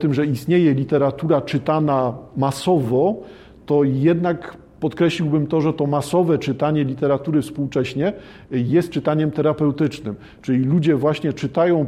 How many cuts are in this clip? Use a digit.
0